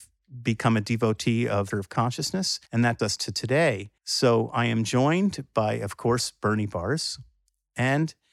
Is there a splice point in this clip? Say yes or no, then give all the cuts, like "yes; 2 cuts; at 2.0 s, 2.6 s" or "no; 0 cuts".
yes; 4 cuts; at 1.7 s, 2.7 s, 3.0 s, 4.0 s